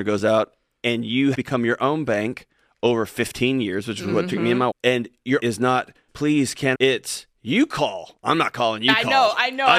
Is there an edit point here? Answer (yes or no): yes